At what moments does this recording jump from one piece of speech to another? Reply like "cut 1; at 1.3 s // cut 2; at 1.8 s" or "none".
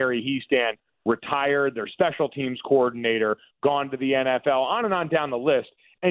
none